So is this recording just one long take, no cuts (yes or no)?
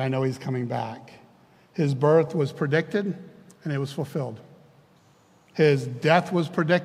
yes